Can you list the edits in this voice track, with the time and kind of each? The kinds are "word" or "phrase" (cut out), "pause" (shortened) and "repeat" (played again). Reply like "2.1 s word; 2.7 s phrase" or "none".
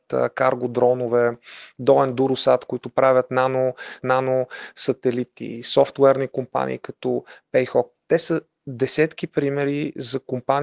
4.0 s repeat